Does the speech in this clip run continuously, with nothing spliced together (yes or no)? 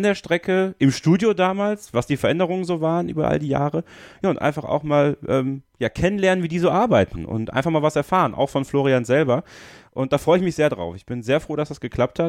yes